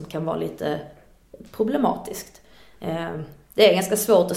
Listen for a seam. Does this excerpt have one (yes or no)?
no